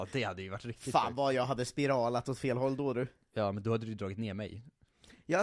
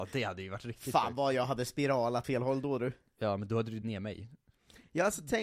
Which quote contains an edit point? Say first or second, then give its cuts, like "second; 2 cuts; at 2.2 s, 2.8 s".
second; 2 cuts; at 2.2 s, 3.8 s